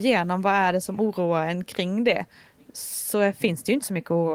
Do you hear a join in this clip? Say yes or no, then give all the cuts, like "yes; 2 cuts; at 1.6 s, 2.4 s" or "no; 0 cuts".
no; 0 cuts